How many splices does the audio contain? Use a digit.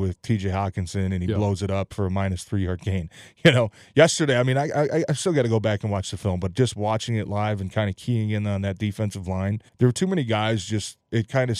1